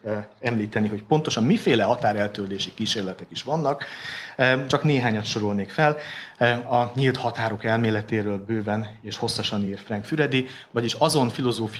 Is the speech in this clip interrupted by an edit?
no; 0 cuts

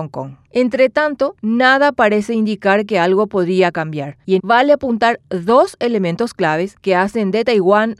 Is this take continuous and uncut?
no; 1 cut; at 4.4 s

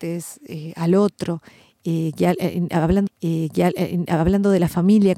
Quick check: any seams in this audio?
yes; 1 cut; at 3.1 s

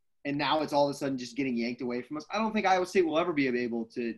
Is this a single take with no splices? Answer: yes; 0 cuts

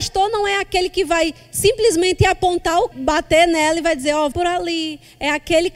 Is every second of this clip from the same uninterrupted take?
no; 2 cuts; at 2.9 s, 4.3 s

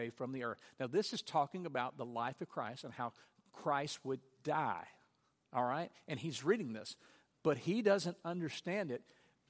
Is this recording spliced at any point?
no; 0 cuts

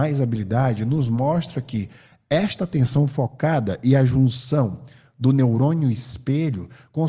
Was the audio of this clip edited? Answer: no; 0 cuts

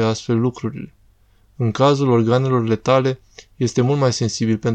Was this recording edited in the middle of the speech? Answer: no; 0 cuts

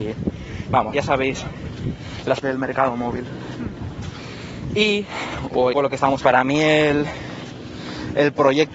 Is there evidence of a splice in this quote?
yes; 4 cuts; at 0.9 s, 2.4 s, 5.7 s, 6.2 s

